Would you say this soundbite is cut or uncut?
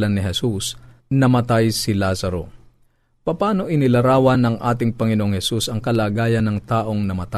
uncut